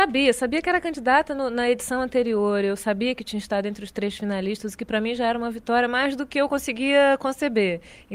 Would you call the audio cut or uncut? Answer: uncut